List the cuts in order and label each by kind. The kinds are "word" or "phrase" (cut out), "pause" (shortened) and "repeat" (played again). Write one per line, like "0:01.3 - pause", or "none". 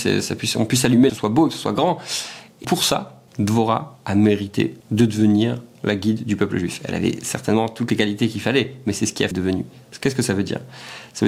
0:01.1 - phrase
0:02.6 - word
0:03.3 - pause
0:04.8 - pause
0:09.3 - phrase